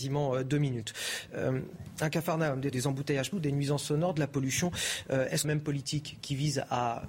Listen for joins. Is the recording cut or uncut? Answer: cut